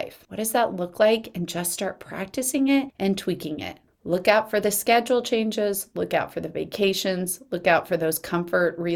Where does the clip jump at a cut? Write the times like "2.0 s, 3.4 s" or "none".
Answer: none